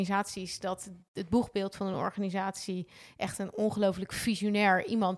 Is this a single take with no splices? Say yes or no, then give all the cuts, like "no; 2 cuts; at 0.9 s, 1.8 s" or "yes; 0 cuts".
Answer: yes; 0 cuts